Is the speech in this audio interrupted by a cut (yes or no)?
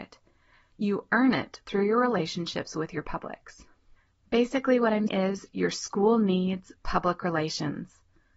yes